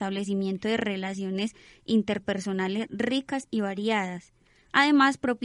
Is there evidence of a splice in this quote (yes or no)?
no